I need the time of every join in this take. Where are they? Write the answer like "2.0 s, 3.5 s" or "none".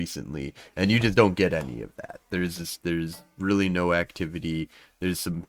none